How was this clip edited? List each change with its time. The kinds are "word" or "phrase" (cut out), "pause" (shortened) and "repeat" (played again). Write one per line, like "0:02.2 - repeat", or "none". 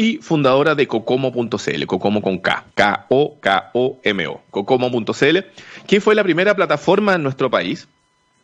0:02.7 - pause